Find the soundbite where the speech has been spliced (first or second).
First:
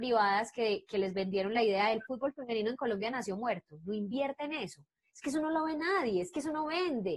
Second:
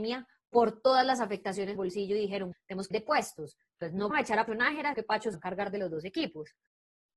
second